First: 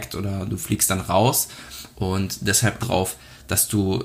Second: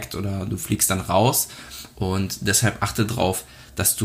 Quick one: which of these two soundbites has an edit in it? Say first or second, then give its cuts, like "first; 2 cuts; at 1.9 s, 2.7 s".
first; 1 cut; at 2.8 s